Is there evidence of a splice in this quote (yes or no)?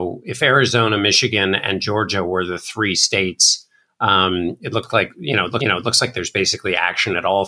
yes